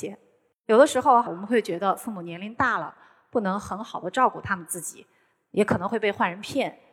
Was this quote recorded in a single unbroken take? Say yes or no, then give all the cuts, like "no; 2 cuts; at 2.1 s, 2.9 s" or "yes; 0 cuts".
no; 1 cut; at 1.3 s